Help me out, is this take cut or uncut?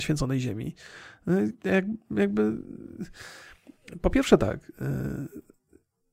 uncut